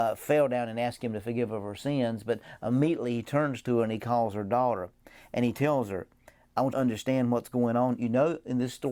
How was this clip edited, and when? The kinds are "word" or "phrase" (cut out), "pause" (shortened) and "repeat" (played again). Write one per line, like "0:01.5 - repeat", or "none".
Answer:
0:06.7 - phrase